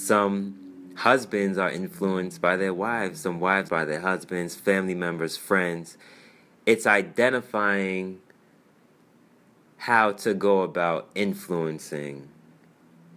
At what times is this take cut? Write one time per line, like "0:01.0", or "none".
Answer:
0:03.7